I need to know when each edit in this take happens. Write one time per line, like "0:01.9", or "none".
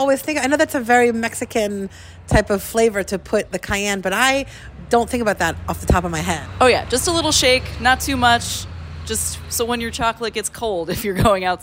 none